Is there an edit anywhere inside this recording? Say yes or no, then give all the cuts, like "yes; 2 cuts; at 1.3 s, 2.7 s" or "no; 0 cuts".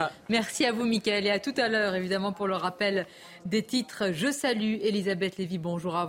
no; 0 cuts